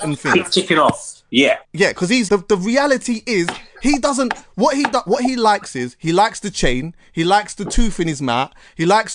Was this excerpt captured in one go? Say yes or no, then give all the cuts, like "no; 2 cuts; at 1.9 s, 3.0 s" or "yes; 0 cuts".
no; 2 cuts; at 1.6 s, 2.3 s